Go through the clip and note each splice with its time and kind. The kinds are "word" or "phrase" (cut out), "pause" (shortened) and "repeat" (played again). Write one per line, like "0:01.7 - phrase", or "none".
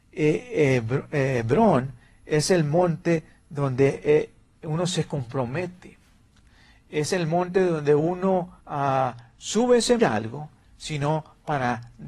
0:08.6 - pause
0:10.0 - phrase